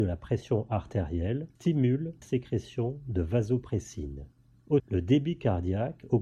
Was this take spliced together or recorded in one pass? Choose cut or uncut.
cut